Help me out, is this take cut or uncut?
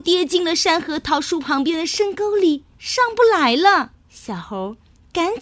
cut